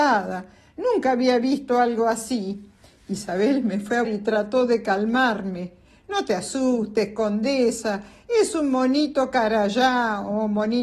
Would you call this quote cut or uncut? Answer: cut